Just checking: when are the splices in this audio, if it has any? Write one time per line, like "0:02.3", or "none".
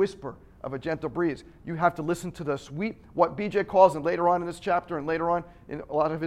none